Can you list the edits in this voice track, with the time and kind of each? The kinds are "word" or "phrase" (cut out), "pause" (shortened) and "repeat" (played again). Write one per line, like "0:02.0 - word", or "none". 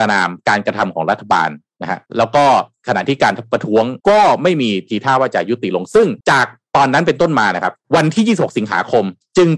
0:02.1 - pause
0:04.0 - pause
0:06.2 - pause
0:07.8 - pause